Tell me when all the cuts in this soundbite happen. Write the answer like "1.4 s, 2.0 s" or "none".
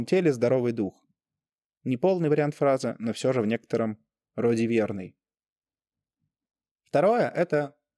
none